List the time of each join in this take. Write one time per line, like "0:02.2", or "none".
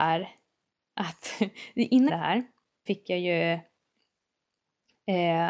0:02.1
0:02.9